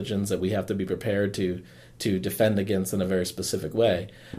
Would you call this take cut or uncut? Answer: uncut